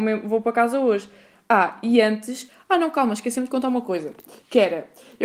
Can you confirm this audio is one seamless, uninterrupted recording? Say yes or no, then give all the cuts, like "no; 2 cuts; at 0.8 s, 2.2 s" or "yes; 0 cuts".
yes; 0 cuts